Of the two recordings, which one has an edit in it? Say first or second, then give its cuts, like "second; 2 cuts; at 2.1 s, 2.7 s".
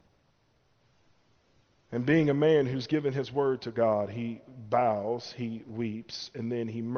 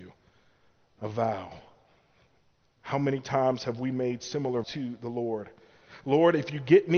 second; 1 cut; at 4.6 s